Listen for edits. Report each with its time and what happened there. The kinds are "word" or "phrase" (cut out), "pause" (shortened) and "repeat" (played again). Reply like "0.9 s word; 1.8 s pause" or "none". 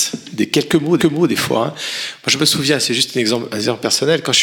1.0 s repeat